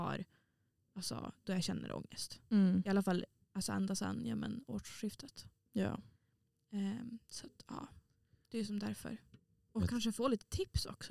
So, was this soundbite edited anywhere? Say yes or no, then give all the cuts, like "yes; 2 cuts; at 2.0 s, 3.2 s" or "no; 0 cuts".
no; 0 cuts